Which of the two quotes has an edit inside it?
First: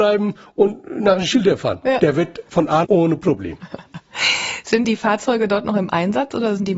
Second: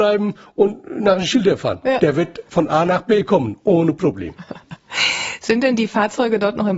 first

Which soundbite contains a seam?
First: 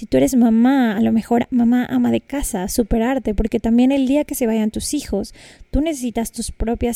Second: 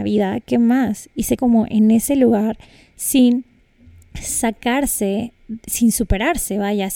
second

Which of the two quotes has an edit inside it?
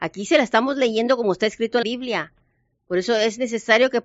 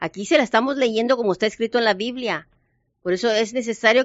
first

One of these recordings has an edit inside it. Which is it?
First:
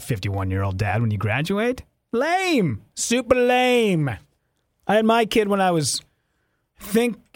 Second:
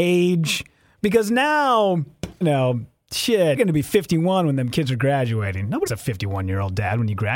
second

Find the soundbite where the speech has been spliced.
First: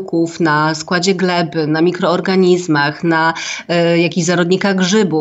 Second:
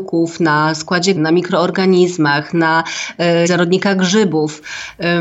second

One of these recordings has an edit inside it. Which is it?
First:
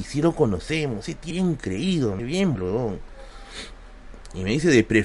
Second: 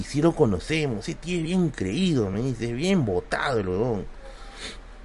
first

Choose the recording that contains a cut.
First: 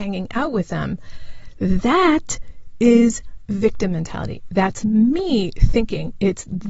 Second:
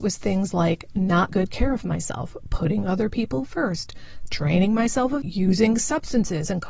second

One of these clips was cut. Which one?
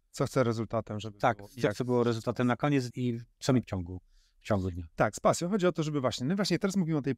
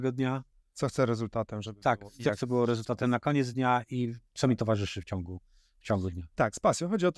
first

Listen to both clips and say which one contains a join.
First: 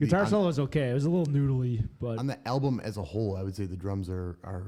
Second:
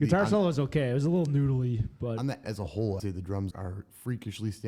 second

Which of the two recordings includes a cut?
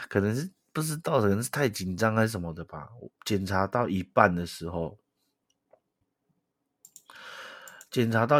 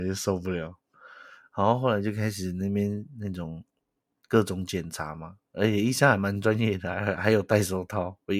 first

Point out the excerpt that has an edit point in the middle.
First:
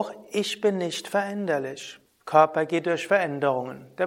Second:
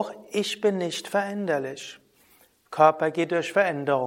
first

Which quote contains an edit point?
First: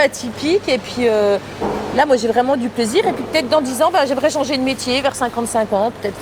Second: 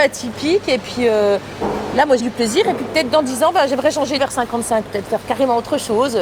second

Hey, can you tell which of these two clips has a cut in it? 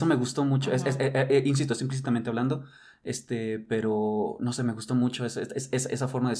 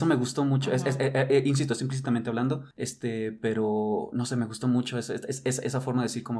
second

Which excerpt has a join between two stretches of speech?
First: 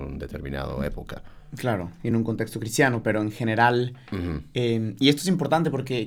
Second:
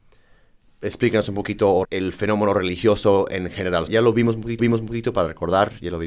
second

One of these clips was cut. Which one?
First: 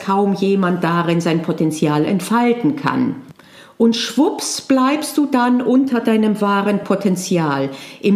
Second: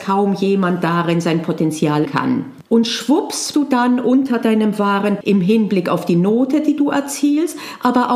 second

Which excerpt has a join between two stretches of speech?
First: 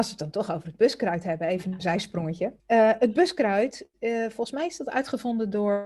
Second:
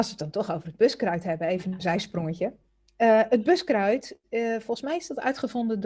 first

